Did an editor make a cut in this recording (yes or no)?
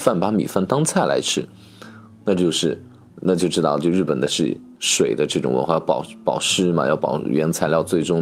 no